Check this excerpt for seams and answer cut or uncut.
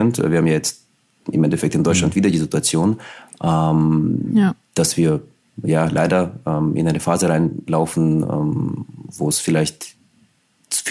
uncut